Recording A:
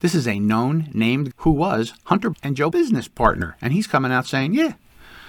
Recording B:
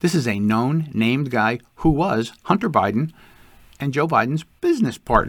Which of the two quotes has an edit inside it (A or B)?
A